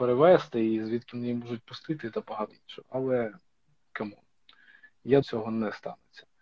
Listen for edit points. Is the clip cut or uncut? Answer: cut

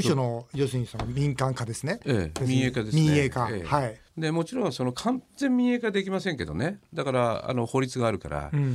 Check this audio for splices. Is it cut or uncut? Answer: cut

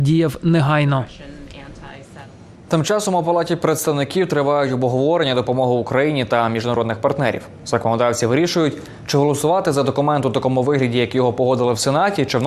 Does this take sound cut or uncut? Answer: uncut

